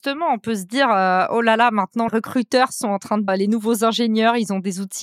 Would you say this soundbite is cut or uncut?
cut